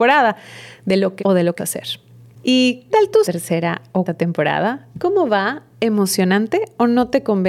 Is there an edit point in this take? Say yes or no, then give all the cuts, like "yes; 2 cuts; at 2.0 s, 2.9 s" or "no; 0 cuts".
yes; 5 cuts; at 1.2 s, 1.6 s, 2.9 s, 3.2 s, 4.1 s